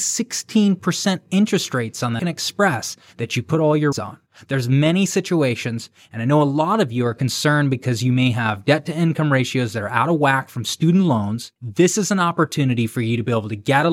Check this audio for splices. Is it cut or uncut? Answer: cut